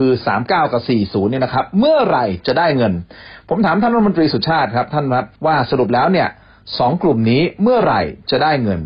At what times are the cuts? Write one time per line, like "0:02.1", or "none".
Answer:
0:05.4